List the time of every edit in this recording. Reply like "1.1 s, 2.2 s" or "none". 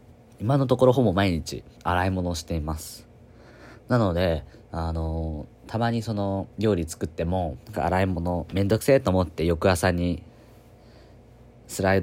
1.8 s, 6.5 s, 7.6 s